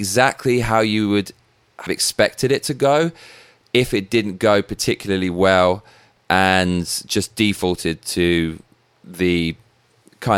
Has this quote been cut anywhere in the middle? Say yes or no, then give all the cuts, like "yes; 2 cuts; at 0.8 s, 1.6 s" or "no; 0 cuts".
yes; 1 cut; at 1.9 s